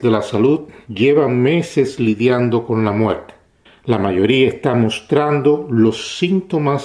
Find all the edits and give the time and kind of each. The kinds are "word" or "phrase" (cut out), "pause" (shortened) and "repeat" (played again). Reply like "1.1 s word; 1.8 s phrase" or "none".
3.7 s pause